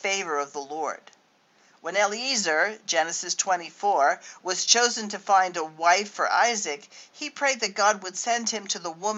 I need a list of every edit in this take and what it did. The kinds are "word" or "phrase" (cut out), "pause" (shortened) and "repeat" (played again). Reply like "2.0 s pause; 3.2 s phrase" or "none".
none